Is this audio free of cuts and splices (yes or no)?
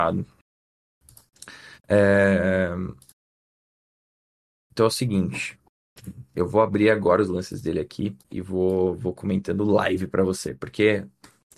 no